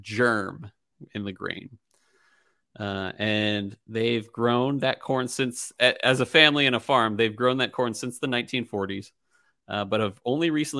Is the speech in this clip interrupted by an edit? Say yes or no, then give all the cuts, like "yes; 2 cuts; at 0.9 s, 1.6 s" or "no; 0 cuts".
no; 0 cuts